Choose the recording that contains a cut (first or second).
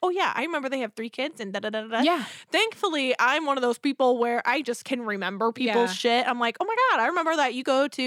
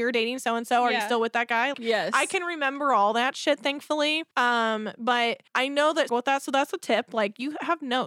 second